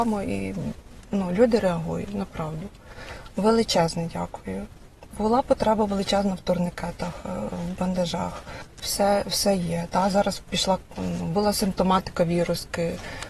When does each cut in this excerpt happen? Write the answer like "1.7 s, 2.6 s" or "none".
none